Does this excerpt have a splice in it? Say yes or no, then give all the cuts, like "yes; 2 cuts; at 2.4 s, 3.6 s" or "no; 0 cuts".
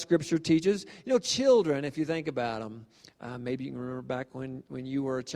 no; 0 cuts